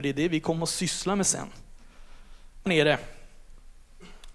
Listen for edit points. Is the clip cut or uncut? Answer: cut